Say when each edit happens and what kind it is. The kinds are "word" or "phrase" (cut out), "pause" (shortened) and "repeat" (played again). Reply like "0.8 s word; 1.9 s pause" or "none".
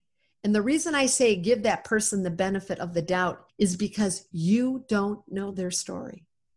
none